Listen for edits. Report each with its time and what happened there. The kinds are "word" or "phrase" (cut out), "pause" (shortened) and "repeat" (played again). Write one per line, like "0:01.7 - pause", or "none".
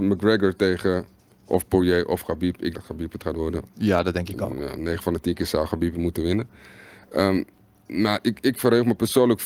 0:02.7 - word